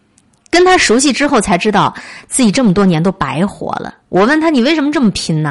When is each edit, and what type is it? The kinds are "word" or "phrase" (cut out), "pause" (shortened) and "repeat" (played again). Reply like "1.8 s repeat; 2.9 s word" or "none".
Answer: 4.0 s pause

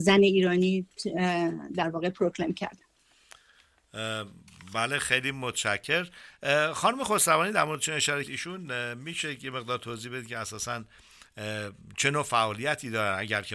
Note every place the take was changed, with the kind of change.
8.2 s word

